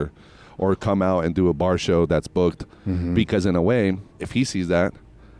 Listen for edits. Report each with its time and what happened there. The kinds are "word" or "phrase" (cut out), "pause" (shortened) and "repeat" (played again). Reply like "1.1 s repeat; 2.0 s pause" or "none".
4.1 s pause